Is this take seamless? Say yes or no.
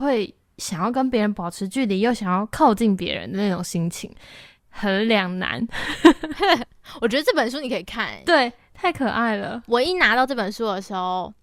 yes